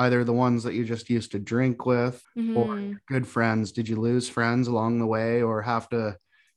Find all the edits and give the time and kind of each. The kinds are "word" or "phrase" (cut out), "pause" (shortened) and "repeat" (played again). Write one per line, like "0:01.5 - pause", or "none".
0:02.2 - pause